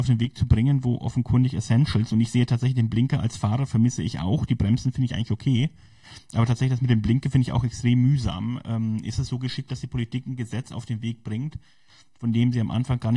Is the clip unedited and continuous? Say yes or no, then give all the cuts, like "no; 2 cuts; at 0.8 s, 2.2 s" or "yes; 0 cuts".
yes; 0 cuts